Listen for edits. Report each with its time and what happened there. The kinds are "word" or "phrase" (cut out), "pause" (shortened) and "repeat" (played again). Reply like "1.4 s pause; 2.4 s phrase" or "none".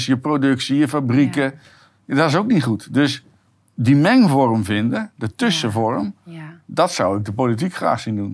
none